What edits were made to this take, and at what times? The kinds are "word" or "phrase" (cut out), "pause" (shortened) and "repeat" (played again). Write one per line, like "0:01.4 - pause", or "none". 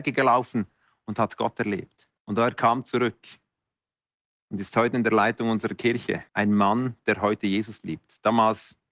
0:02.2 - pause
0:06.3 - pause